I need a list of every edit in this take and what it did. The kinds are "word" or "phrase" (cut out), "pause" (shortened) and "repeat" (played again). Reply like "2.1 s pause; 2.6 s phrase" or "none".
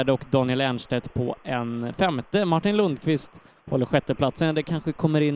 none